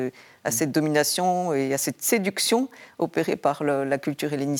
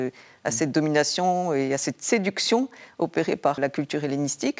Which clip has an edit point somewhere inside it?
second; 1 cut; at 3.6 s

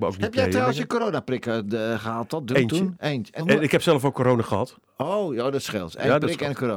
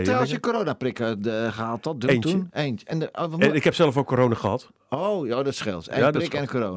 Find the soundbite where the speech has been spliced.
first; 1 cut; at 3.4 s

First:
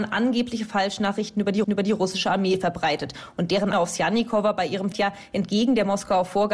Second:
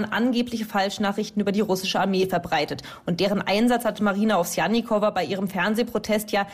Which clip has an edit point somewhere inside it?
first; 3 cuts; at 1.6 s, 3.7 s, 4.9 s

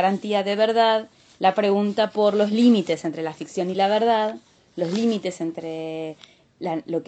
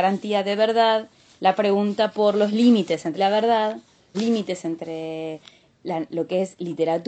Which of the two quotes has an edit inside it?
second; 2 cuts; at 3.2 s, 4.1 s

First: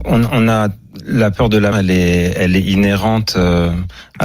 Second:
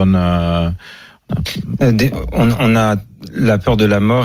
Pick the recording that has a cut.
first; 1 cut; at 1.7 s

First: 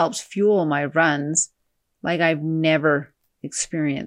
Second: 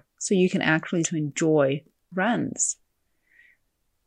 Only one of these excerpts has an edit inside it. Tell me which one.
second; 2 cuts; at 1.0 s, 2.1 s

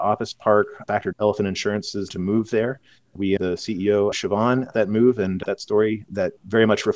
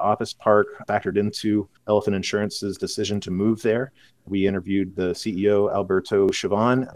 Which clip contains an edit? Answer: first; 6 cuts; at 1.1 s, 2.1 s, 3.4 s, 4.1 s, 4.7 s, 5.4 s

